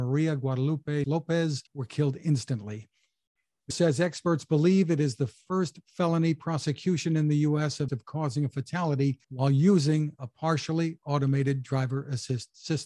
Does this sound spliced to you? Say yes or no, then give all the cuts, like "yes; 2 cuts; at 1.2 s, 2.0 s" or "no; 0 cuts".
yes; 5 cuts; at 1.0 s, 1.7 s, 3.7 s, 7.9 s, 9.2 s